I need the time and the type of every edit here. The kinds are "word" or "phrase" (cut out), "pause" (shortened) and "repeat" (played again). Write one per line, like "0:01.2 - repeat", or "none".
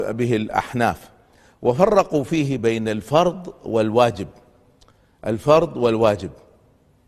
none